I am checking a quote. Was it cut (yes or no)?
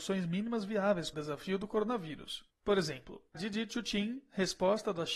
yes